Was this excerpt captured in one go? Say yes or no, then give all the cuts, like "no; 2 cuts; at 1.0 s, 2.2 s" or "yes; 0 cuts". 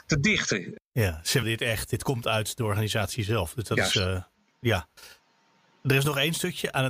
no; 1 cut; at 1.4 s